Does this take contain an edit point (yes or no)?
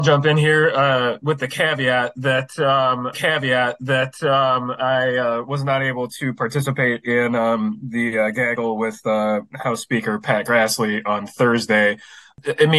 yes